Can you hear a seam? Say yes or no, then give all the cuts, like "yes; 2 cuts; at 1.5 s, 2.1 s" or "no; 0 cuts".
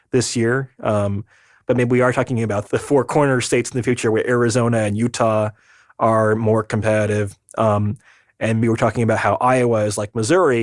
yes; 2 cuts; at 2.7 s, 8.6 s